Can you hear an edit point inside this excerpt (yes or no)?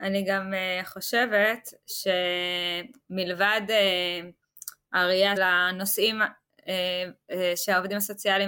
yes